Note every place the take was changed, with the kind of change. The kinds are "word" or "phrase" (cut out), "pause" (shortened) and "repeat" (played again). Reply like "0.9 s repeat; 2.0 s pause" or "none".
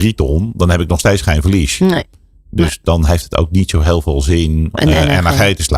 4.7 s word